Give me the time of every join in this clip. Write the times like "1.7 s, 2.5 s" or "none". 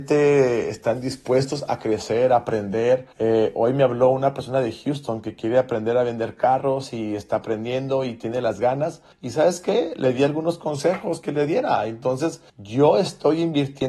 3.1 s, 9.1 s, 12.5 s